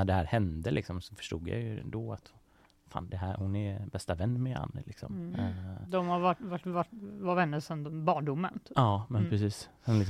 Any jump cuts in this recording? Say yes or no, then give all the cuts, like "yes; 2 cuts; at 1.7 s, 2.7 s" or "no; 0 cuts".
no; 0 cuts